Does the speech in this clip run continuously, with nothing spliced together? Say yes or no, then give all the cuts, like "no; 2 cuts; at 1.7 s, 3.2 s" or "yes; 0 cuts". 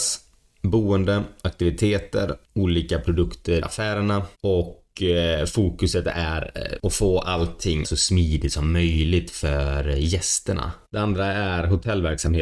no; 6 cuts; at 2.4 s, 3.6 s, 4.3 s, 6.8 s, 7.8 s, 10.8 s